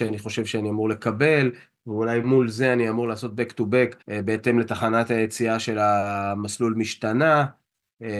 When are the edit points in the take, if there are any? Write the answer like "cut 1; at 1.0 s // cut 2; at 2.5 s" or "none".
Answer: cut 1; at 4.0 s